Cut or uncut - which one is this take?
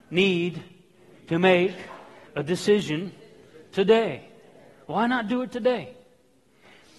cut